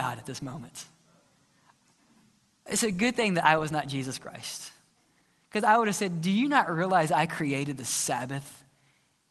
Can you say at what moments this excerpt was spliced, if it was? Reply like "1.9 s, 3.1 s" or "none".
none